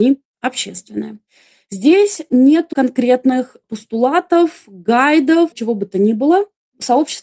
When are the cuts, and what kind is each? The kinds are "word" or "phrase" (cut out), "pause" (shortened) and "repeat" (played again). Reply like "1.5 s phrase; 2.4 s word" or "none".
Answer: 2.7 s word; 5.5 s word

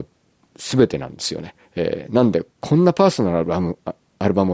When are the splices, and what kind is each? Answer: 1.6 s pause; 2.5 s pause

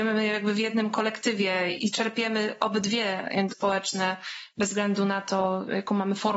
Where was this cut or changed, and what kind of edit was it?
3.5 s word

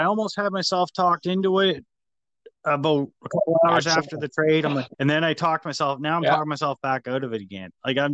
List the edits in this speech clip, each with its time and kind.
3.2 s pause; 4.9 s pause

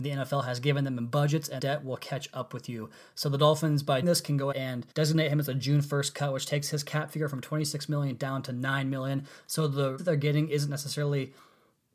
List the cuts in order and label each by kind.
1.6 s word; 4.0 s word; 4.5 s word; 4.9 s pause; 10.0 s word

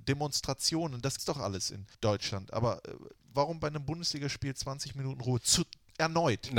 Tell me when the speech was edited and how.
1.2 s word; 1.9 s pause

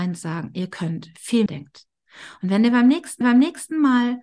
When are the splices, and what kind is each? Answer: 1.5 s phrase; 3.2 s repeat

